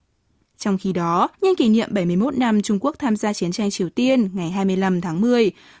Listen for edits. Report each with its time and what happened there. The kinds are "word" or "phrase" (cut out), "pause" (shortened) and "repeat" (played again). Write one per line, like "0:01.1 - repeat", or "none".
0:01.3 - pause